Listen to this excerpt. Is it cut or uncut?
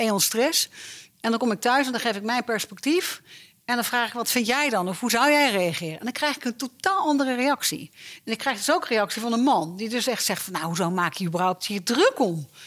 uncut